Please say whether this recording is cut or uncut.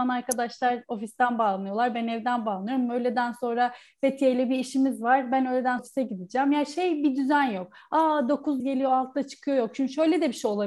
cut